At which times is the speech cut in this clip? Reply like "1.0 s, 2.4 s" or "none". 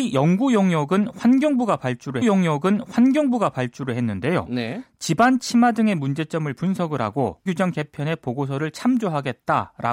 2.2 s, 7.5 s